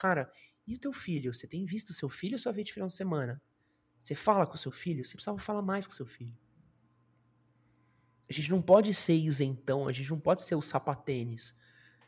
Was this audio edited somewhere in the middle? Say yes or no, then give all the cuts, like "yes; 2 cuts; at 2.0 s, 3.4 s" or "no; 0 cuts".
no; 0 cuts